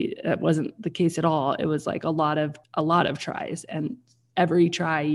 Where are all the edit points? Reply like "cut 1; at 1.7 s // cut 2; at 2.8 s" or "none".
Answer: cut 1; at 2.6 s